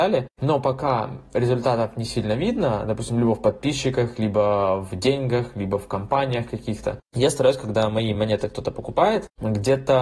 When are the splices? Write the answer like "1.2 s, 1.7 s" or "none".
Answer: none